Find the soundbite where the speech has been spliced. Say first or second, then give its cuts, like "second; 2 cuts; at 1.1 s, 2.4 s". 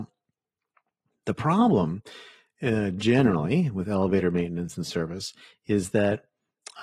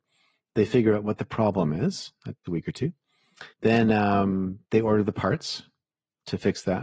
second; 3 cuts; at 2.5 s, 3.5 s, 4.6 s